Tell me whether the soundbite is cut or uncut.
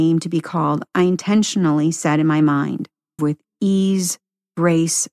cut